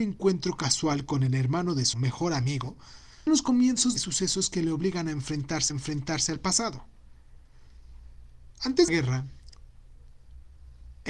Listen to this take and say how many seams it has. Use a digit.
5